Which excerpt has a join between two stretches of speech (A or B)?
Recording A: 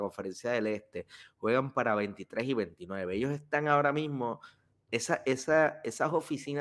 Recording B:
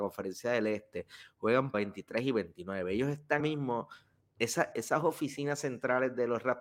B